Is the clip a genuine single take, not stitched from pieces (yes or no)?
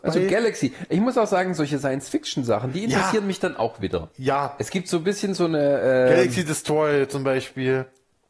yes